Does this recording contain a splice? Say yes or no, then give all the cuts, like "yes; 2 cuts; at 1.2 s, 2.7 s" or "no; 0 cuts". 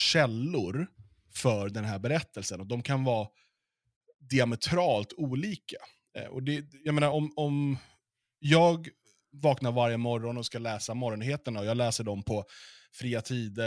no; 0 cuts